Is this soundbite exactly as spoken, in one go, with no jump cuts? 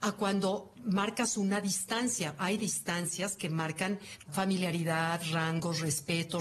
no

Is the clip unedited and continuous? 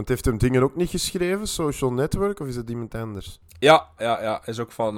no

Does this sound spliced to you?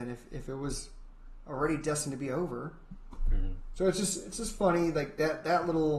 no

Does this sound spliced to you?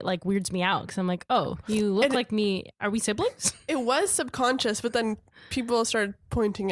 no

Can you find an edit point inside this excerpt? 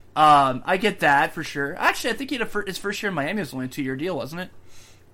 no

